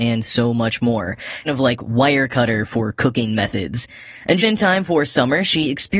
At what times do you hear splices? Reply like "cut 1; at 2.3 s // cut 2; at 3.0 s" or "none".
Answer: cut 1; at 1.5 s // cut 2; at 4.4 s